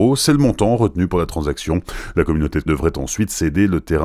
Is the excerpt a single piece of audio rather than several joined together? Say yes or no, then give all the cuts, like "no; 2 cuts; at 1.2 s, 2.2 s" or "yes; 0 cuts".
no; 1 cut; at 2.7 s